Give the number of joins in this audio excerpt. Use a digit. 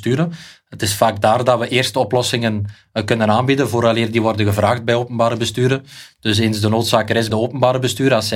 1